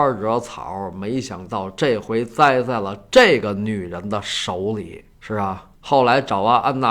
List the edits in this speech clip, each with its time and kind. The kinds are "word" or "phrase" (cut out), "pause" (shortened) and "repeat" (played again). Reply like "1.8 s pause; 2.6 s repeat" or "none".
5.1 s pause; 5.8 s pause